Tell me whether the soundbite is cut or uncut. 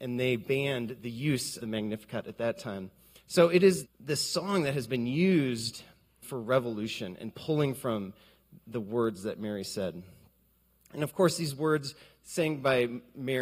cut